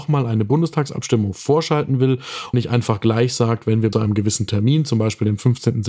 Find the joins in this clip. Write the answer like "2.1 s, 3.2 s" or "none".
2.5 s, 3.9 s